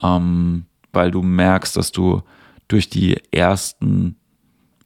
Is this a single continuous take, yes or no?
yes